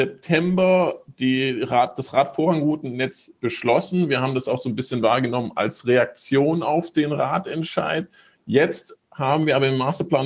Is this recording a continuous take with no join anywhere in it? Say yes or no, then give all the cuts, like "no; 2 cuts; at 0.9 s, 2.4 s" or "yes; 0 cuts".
yes; 0 cuts